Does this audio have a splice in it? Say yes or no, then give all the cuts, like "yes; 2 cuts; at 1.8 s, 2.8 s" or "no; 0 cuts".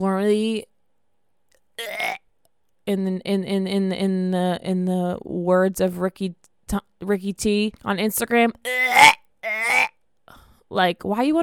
yes; 1 cut; at 7.8 s